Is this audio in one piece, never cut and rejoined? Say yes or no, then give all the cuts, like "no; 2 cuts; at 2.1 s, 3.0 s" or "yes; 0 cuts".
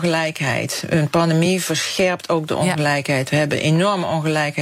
yes; 0 cuts